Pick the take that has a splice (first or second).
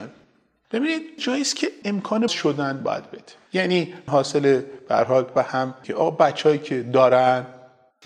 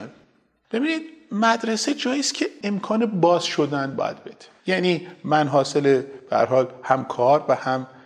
first